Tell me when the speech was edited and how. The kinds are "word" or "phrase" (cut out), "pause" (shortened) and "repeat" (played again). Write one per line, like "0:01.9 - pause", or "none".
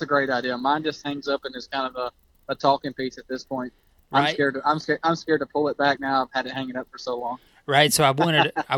none